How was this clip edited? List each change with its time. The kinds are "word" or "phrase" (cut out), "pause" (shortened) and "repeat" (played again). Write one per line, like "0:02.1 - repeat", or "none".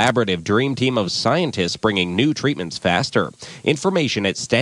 none